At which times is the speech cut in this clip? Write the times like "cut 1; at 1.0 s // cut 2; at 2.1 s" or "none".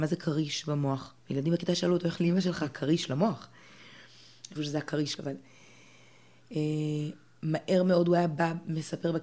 cut 1; at 1.2 s // cut 2; at 2.2 s // cut 3; at 4.6 s // cut 4; at 5.2 s